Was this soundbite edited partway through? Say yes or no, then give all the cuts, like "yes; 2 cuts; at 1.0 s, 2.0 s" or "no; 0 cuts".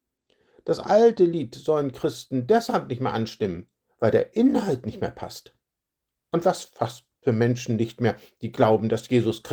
no; 0 cuts